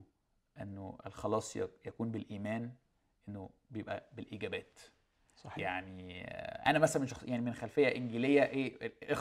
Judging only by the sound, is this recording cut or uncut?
uncut